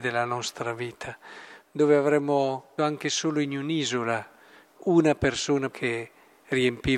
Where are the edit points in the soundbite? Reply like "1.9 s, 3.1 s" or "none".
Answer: 2.8 s, 4.8 s, 5.7 s